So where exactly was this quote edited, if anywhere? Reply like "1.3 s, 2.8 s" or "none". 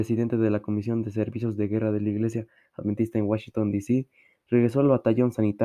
none